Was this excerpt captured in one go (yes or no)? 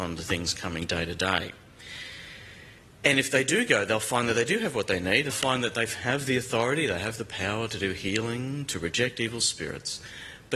no